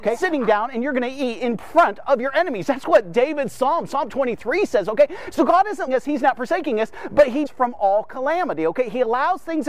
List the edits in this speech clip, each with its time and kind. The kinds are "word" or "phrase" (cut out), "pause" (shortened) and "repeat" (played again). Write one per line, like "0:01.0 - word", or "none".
0:05.9 - word
0:07.5 - phrase